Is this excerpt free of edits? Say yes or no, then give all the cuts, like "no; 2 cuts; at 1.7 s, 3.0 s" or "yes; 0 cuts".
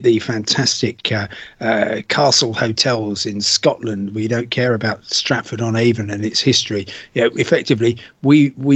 yes; 0 cuts